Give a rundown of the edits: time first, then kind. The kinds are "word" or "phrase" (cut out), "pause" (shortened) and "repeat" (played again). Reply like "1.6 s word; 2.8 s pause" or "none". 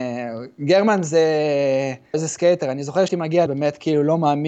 2.1 s word; 3.1 s word; 3.5 s word